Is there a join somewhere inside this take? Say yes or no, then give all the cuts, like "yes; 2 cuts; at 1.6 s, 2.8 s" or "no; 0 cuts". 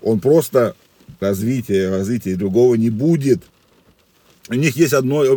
yes; 1 cut; at 1.2 s